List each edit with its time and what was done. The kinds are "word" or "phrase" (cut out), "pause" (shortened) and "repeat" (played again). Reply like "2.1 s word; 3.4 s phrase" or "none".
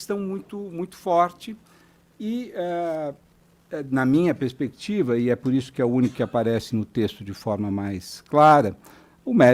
none